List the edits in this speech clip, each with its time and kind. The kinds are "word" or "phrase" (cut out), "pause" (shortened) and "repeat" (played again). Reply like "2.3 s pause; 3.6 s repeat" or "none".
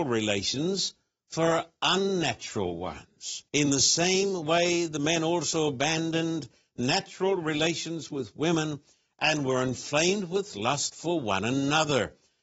3.5 s pause